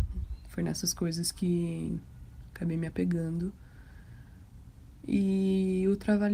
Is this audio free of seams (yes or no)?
yes